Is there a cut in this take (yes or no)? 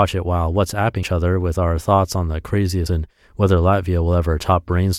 yes